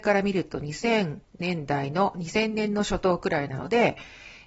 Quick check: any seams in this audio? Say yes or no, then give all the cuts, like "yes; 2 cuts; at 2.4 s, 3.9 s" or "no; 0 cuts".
yes; 1 cut; at 1.3 s